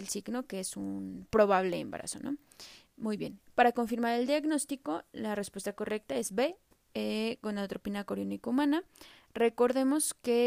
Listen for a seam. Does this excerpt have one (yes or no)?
no